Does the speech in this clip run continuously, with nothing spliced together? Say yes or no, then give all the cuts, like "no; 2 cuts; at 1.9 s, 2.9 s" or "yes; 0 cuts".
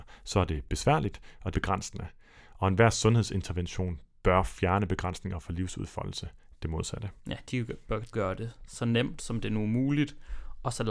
no; 4 cuts; at 1.5 s, 6.5 s, 7.2 s, 8.1 s